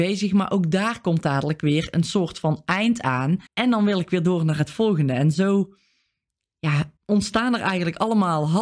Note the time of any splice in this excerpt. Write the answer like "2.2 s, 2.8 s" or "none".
3.5 s, 7.0 s